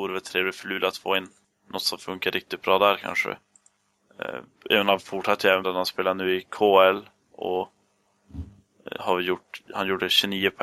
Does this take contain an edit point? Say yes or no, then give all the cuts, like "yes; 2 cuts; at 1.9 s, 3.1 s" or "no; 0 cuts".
yes; 1 cut; at 5.6 s